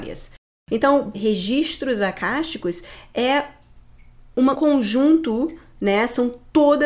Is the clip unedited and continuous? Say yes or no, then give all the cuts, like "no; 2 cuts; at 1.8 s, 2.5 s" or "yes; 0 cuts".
no; 2 cuts; at 1.1 s, 4.5 s